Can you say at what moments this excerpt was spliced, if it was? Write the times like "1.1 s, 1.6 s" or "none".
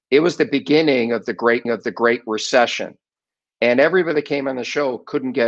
1.7 s